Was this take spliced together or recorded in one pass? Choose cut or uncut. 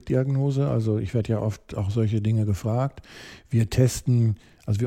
uncut